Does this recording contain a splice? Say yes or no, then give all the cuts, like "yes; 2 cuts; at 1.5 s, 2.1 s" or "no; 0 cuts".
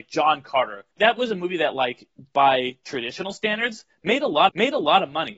yes; 2 cuts; at 0.9 s, 4.5 s